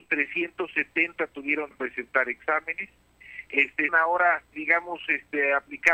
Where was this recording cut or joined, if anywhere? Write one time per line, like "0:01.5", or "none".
0:01.7
0:03.9
0:04.5